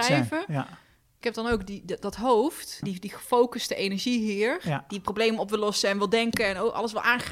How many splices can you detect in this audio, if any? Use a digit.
2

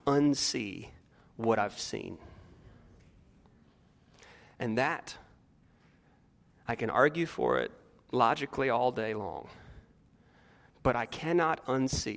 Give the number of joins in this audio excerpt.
0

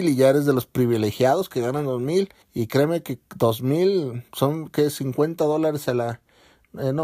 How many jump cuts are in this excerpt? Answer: 2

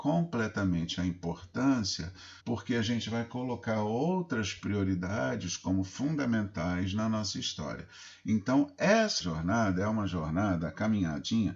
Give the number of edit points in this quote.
2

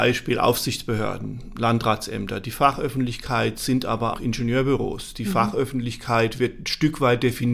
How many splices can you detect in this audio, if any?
1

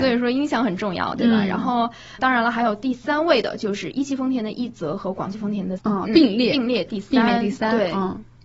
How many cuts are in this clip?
2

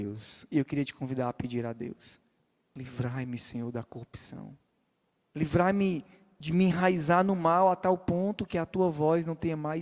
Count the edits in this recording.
0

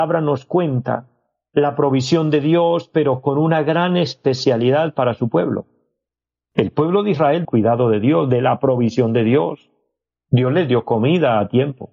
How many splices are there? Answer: 1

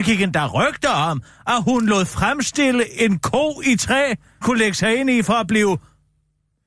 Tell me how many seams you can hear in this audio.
1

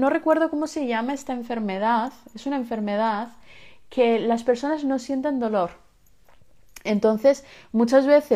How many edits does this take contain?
0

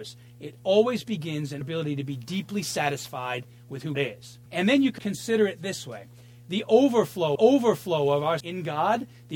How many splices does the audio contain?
6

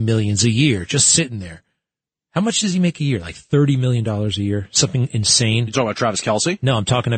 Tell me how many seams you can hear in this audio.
0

